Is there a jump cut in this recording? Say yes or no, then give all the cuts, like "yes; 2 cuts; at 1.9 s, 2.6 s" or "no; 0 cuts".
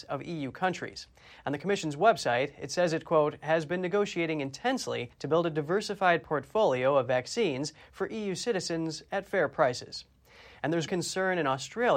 yes; 2 cuts; at 5.1 s, 10.9 s